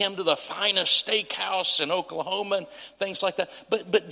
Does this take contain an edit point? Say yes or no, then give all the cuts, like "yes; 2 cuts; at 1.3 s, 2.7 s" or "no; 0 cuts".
no; 0 cuts